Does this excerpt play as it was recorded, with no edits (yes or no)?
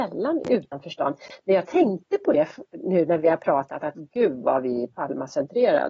yes